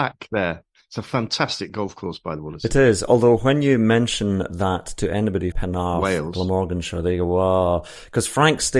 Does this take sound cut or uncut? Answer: cut